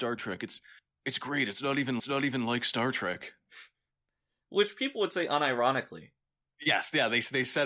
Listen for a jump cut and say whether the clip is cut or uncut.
cut